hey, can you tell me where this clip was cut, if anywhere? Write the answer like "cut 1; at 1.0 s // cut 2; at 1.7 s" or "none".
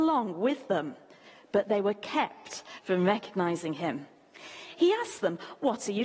none